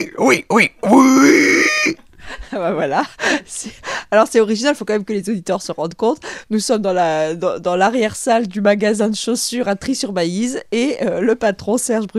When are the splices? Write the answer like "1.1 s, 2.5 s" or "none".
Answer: none